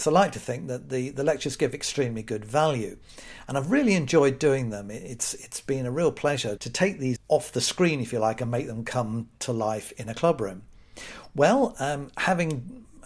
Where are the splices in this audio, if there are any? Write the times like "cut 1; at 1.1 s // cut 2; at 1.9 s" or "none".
cut 1; at 6.6 s // cut 2; at 7.2 s